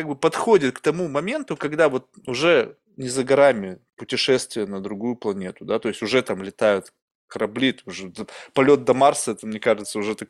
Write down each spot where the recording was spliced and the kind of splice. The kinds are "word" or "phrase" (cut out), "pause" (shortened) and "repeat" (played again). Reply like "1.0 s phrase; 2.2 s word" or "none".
2.2 s word